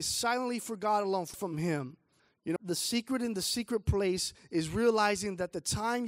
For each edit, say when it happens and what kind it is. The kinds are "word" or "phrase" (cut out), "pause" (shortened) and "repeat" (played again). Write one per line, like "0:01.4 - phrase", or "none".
0:01.3 - phrase
0:02.2 - pause
0:02.6 - word

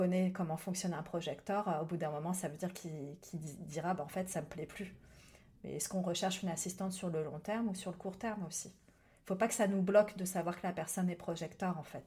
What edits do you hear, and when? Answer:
none

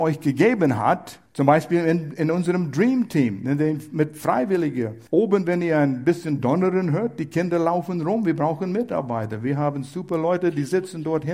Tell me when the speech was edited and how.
0:01.3 - pause
0:05.1 - pause

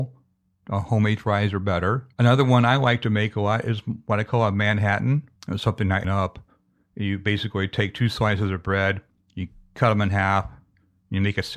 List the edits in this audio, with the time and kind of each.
0:02.1 - pause
0:05.4 - pause
0:06.0 - phrase
0:09.1 - pause

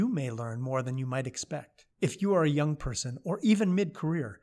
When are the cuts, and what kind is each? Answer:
0:01.9 - pause

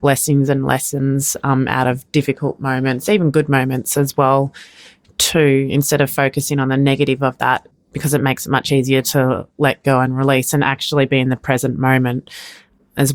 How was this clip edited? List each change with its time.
none

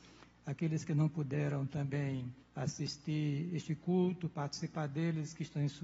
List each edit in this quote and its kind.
0:02.4 - pause

